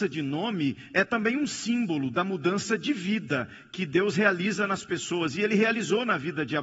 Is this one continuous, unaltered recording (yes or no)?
yes